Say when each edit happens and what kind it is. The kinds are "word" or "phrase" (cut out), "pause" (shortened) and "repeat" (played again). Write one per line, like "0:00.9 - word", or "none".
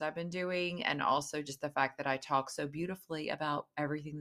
none